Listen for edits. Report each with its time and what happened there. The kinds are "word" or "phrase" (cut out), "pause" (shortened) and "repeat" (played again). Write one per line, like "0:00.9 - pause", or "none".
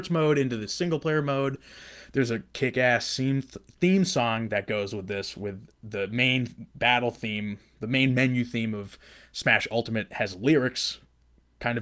none